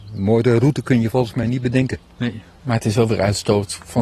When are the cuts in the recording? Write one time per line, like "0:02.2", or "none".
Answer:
none